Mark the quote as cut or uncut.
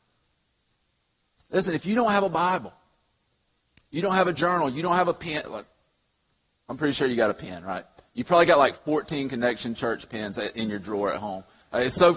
uncut